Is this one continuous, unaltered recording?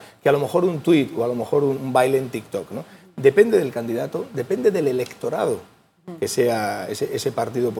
no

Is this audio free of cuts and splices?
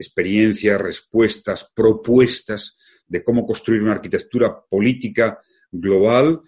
yes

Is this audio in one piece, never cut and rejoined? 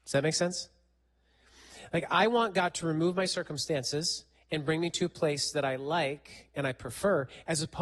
yes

